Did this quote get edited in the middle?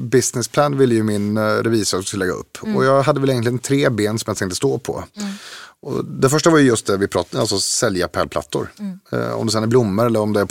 no; 0 cuts

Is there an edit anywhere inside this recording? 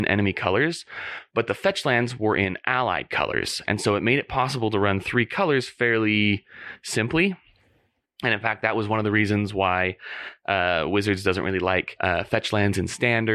no; 0 cuts

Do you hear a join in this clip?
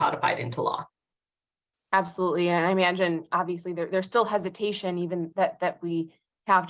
no; 0 cuts

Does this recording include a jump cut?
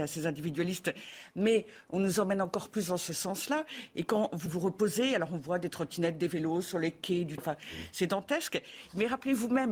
yes; 2 cuts; at 4.5 s, 7.4 s

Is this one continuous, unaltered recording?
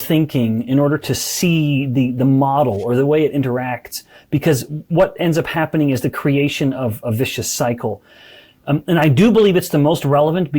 yes; 0 cuts

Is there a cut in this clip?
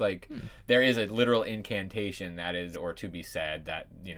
yes; 1 cut; at 2.7 s

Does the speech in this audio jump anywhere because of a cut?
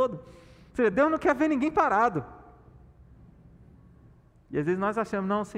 no; 0 cuts

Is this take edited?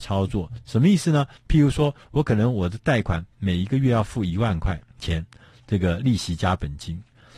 yes; 2 cuts; at 1.4 s, 4.9 s

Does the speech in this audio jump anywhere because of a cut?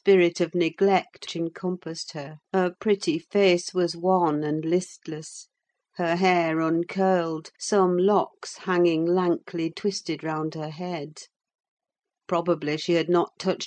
yes; 4 cuts; at 1.3 s, 2.4 s, 7.6 s, 9.7 s

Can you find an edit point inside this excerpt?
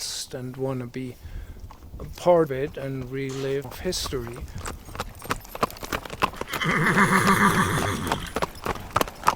yes; 2 cuts; at 2.5 s, 3.6 s

